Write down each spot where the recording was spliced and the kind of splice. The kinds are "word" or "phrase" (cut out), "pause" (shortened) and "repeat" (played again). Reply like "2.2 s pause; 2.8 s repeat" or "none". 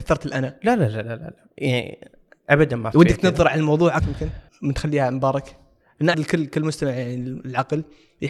1.0 s word; 1.5 s pause; 2.9 s word; 4.0 s phrase; 4.5 s pause; 6.1 s word